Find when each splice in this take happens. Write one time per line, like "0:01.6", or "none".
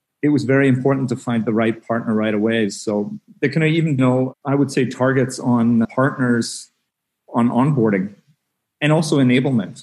0:04.0
0:05.8